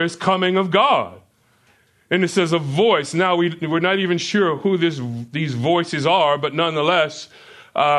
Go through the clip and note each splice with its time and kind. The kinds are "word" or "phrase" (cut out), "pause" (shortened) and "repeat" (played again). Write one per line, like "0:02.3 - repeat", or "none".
none